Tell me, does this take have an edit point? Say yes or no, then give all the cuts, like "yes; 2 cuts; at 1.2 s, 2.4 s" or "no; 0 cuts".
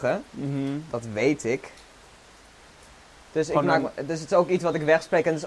no; 0 cuts